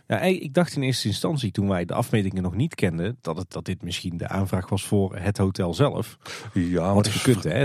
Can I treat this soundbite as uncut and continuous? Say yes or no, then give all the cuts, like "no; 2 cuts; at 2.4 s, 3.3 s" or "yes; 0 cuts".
no; 2 cuts; at 1.9 s, 3.5 s